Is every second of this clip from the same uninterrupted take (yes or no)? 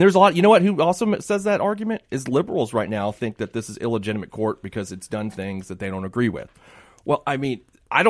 yes